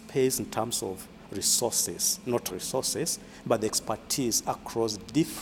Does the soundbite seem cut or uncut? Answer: cut